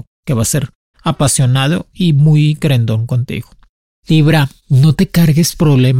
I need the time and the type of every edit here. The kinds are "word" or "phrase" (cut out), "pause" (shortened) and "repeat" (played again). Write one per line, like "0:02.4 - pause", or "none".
0:00.9 - word
0:04.6 - pause